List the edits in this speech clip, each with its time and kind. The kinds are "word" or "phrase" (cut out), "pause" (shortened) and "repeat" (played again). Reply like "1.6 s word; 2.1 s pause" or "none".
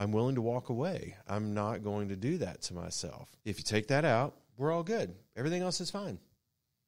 3.4 s pause